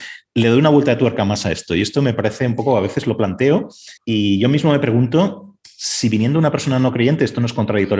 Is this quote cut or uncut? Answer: cut